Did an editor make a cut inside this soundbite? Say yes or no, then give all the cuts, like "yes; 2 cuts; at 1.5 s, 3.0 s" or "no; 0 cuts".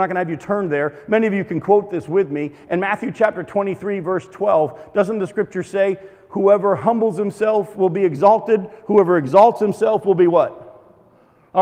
no; 0 cuts